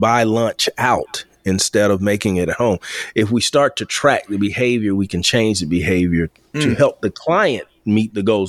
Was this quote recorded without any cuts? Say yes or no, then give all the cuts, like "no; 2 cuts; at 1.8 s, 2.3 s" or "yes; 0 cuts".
yes; 0 cuts